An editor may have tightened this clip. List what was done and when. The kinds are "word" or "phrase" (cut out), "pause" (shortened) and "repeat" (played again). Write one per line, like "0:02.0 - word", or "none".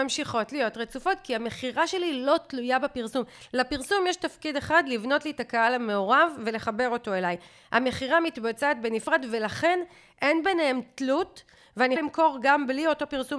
0:12.0 - word